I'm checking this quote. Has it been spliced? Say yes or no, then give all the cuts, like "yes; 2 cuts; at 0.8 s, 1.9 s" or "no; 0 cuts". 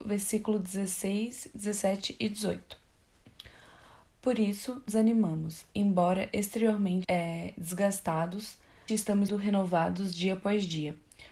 yes; 4 cuts; at 4.9 s, 7.0 s, 8.9 s, 9.3 s